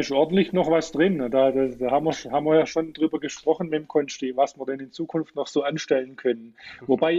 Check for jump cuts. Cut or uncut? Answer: uncut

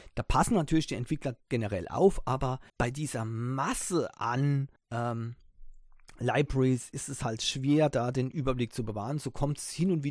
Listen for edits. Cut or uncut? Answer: cut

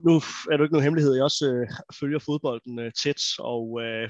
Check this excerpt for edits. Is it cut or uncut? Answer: uncut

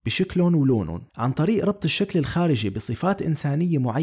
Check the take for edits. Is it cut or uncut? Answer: cut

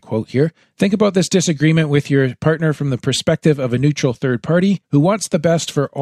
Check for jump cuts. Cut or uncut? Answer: cut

